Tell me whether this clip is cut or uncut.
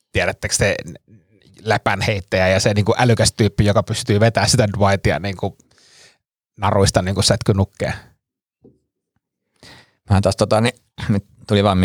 uncut